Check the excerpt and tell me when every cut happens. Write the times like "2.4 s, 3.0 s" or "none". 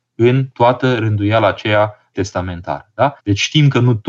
2.1 s, 3.2 s